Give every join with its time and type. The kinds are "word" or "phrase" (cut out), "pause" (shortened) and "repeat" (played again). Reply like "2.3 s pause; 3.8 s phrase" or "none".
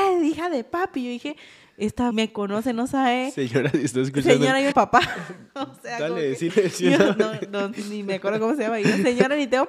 2.1 s phrase; 4.7 s phrase; 6.5 s word